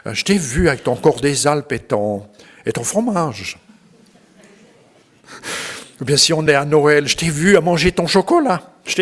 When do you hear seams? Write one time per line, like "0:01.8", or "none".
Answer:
none